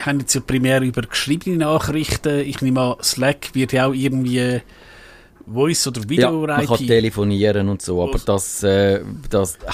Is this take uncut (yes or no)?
yes